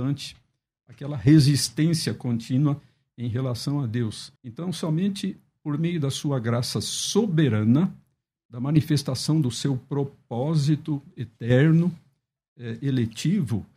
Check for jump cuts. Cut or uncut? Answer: cut